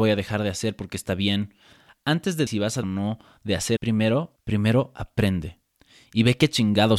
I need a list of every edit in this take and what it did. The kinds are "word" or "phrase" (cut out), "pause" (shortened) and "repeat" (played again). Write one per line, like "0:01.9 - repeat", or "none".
0:02.5 - word
0:02.8 - word
0:03.8 - word
0:04.4 - word